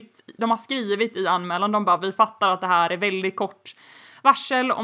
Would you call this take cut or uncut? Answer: uncut